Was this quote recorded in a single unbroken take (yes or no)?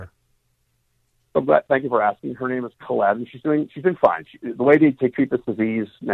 no